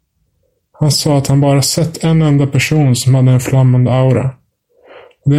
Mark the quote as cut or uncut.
uncut